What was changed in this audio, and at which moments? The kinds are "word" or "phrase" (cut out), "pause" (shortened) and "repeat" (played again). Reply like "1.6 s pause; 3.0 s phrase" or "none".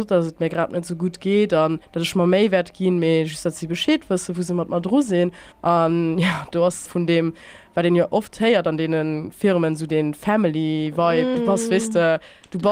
1.8 s pause; 5.5 s pause; 6.9 s word; 11.3 s word